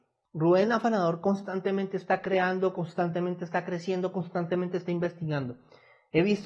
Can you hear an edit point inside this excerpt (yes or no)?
no